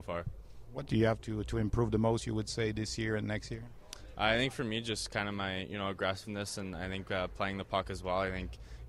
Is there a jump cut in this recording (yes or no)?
no